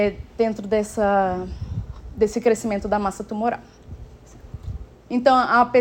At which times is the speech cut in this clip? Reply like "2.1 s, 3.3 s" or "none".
4.9 s